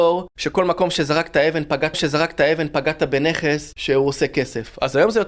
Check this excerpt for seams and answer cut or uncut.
cut